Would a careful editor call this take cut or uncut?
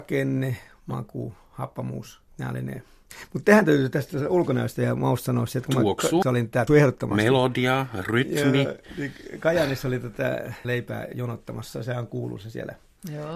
cut